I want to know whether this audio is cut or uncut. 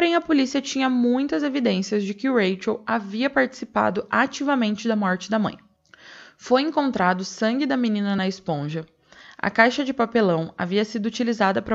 uncut